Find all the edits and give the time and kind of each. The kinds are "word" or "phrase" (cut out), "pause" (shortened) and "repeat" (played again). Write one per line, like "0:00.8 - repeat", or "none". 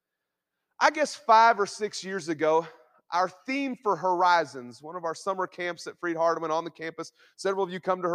none